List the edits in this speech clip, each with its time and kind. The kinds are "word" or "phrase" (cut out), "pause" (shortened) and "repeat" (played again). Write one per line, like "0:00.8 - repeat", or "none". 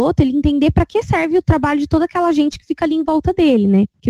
none